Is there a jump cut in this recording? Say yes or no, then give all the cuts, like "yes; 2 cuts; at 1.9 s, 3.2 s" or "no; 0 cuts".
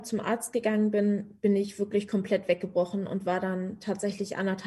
no; 0 cuts